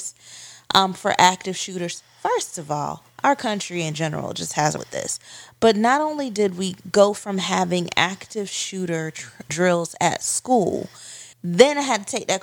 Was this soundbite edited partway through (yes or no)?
yes